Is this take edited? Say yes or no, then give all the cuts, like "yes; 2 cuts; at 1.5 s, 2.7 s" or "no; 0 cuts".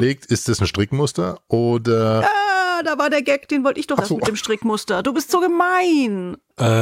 yes; 1 cut; at 4.0 s